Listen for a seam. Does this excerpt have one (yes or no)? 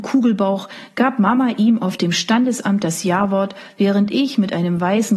no